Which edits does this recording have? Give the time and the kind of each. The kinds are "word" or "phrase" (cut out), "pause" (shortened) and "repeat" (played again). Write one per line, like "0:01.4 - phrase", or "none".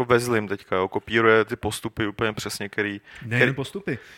none

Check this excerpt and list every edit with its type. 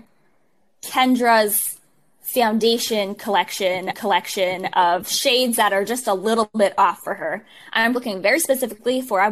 0:03.9 - repeat
0:07.9 - word

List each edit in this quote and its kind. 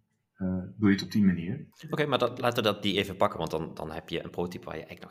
0:01.7 - pause

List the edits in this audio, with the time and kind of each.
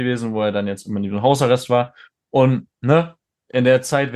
none

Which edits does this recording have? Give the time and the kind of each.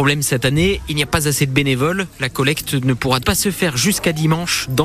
0:03.2 - word

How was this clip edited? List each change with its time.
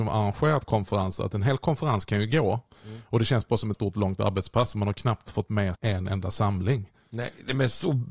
0:02.8 - pause
0:03.7 - word
0:05.7 - word

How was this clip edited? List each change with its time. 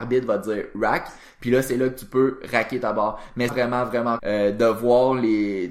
0:03.5 - phrase
0:04.2 - word

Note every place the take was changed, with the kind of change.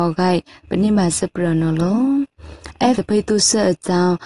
0:03.0 - word

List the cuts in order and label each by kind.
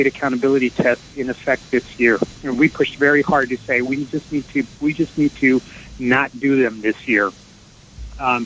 0:01.1 - pause
0:02.4 - pause
0:04.7 - pause

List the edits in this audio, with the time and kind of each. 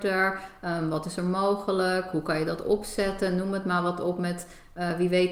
none

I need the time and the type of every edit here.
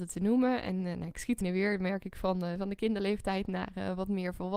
0:01.4 - phrase

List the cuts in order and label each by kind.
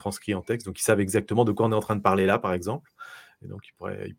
none

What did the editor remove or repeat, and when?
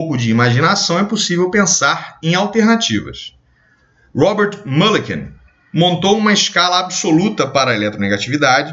none

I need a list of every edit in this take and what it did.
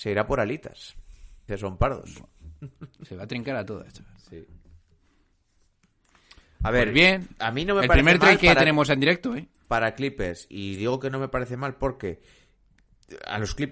0:01.5 - word
0:10.5 - word

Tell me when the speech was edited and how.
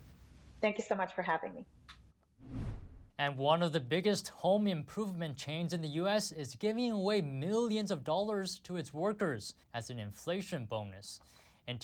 0:03.1 - pause
0:09.6 - pause

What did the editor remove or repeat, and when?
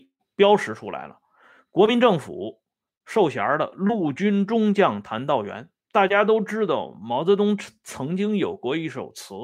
0:05.8 - pause

